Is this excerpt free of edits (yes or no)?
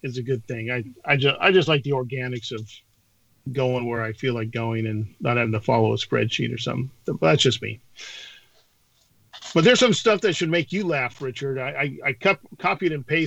yes